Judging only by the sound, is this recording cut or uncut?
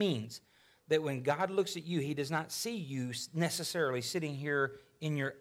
uncut